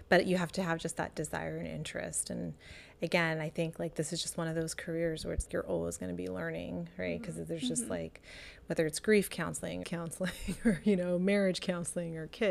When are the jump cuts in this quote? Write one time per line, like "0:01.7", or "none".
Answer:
0:05.5
0:09.8